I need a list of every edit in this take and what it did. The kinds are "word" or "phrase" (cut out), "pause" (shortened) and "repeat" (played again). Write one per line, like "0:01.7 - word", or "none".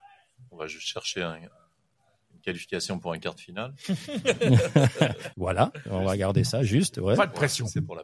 0:05.3 - word